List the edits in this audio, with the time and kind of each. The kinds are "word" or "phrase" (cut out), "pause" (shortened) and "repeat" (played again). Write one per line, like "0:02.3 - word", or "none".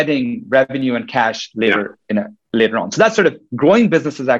none